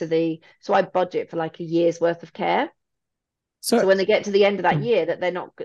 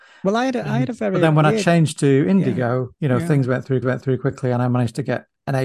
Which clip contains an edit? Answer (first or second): second